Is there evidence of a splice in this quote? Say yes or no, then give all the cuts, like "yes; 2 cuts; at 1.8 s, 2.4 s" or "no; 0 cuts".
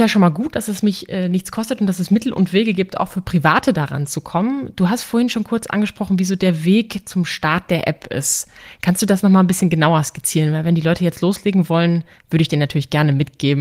no; 0 cuts